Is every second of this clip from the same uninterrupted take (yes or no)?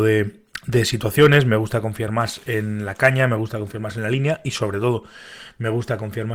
yes